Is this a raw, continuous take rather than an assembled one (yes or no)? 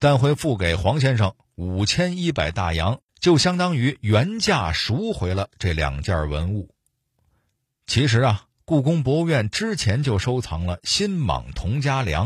no